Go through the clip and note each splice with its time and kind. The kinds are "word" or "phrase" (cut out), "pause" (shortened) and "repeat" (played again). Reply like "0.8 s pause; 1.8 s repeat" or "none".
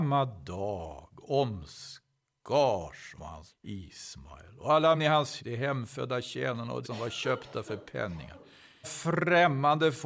3.2 s word; 3.5 s word; 4.9 s word; 5.4 s word; 6.8 s word; 8.8 s word